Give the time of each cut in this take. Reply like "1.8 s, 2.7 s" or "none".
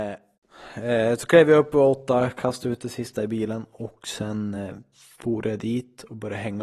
none